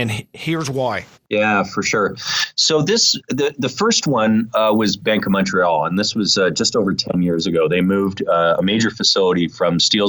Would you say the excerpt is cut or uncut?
uncut